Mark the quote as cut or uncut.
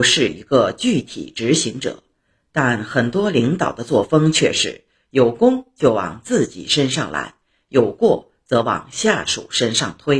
uncut